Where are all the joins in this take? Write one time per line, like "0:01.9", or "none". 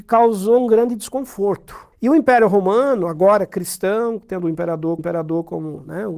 0:01.9
0:05.0